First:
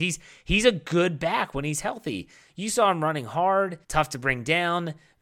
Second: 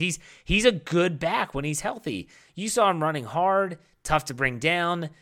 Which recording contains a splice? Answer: first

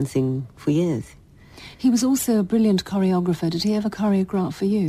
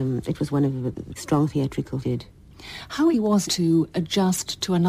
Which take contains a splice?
second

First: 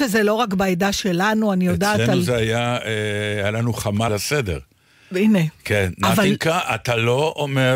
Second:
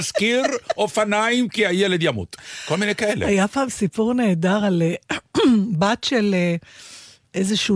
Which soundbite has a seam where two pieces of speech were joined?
first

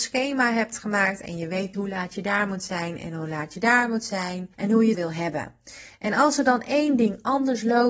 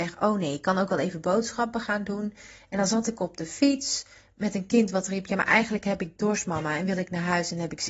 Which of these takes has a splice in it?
first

